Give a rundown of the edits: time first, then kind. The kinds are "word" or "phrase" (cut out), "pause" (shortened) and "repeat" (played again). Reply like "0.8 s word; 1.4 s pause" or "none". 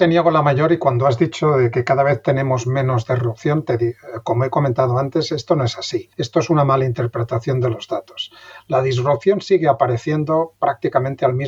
6.1 s pause